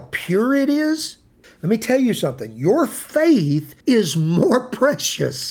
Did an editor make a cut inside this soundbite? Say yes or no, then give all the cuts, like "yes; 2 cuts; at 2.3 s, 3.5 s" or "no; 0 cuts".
yes; 2 cuts; at 1.4 s, 3.8 s